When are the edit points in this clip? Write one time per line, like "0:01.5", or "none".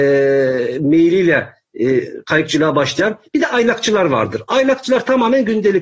none